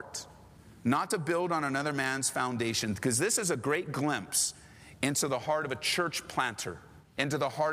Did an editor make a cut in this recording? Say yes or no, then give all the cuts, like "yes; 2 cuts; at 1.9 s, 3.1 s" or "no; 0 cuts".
no; 0 cuts